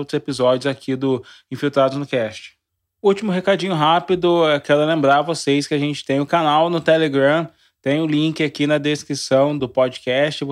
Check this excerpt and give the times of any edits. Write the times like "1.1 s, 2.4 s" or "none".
9.6 s